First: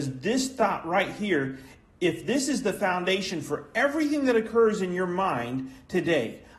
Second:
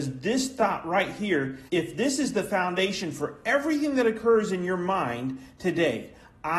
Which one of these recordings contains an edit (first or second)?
second